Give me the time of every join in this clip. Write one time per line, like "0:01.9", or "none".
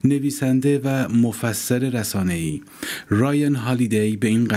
none